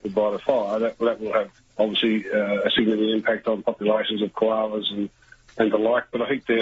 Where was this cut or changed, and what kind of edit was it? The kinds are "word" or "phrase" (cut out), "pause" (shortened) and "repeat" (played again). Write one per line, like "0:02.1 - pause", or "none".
0:01.7 - pause